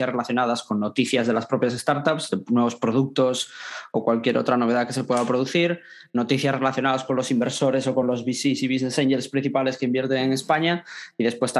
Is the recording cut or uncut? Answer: uncut